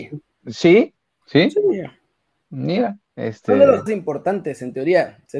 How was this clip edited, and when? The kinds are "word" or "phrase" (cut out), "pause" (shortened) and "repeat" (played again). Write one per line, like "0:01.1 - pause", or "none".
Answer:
0:03.9 - word

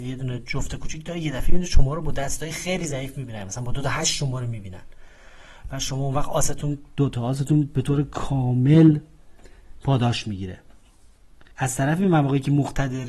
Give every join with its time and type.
0:11.5 - pause

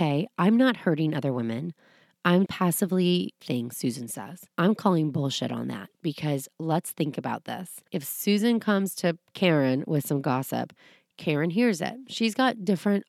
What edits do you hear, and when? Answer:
0:02.5 - word
0:03.4 - phrase
0:04.5 - pause
0:07.9 - pause

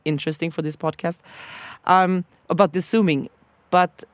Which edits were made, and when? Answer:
0:02.7 - word

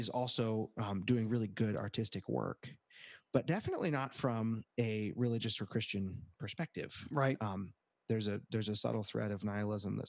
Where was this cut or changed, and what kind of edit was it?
none

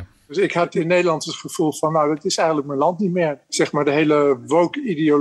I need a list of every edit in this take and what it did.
0:03.4 - pause

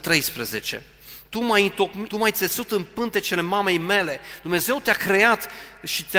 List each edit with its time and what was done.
0:02.1 - phrase

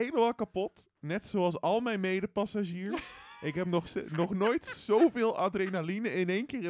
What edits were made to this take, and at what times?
none

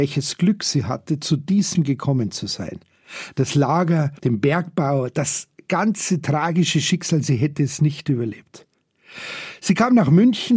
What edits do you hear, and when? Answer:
0:01.7 - word

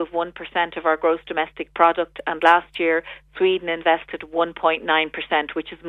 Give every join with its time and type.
none

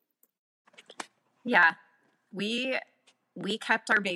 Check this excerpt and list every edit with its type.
none

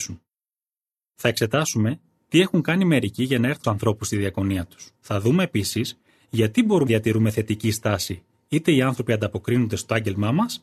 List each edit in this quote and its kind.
0:03.6 - phrase
0:05.0 - pause
0:06.9 - word

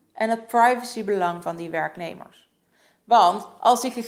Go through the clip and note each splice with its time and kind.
none

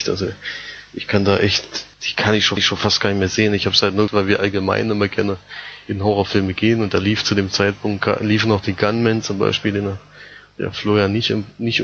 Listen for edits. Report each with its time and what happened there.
0:01.9 - pause
0:02.6 - repeat
0:04.1 - word

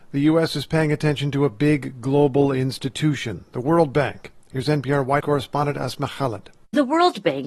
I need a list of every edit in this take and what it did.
0:05.2 - word

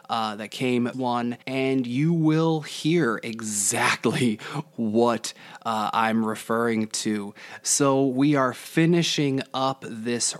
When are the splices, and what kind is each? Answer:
0:00.9 - phrase
0:01.4 - pause

